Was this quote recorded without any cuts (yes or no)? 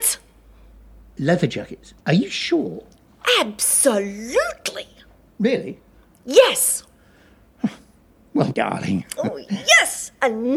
no